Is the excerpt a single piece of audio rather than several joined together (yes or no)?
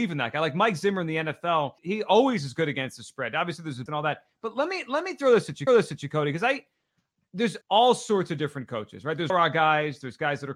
no